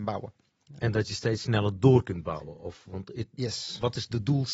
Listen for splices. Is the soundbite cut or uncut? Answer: uncut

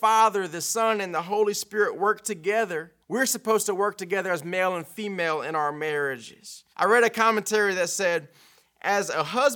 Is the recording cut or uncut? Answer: cut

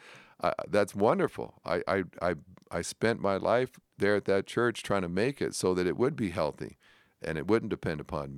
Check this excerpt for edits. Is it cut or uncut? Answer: uncut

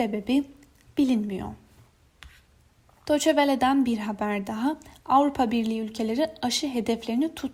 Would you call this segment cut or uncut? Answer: uncut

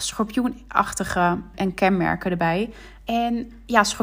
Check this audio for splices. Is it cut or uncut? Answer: cut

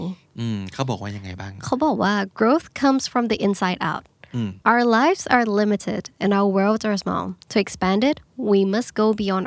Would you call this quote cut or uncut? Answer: cut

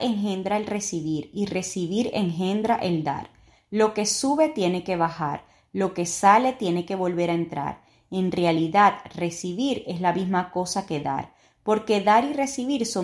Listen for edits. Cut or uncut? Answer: uncut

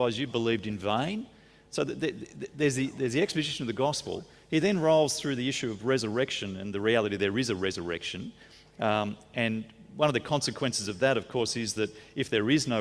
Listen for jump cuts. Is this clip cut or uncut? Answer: uncut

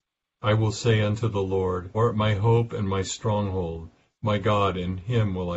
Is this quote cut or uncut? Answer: cut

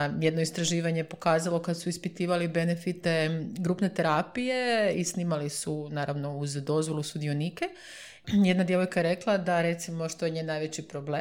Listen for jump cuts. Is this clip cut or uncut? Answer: uncut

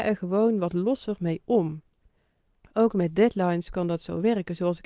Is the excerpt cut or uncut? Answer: uncut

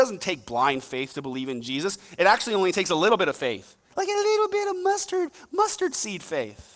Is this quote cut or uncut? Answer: uncut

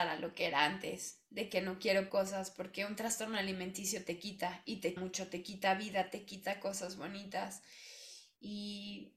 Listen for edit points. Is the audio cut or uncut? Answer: cut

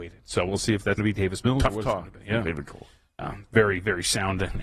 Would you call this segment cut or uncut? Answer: cut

